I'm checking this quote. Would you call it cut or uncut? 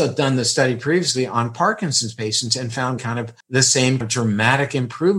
cut